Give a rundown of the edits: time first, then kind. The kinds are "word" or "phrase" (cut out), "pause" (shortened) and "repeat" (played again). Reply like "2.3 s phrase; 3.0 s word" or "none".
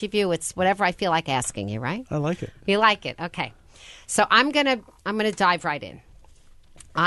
none